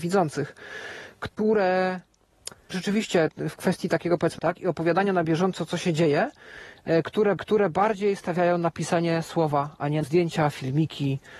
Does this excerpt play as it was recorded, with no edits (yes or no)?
no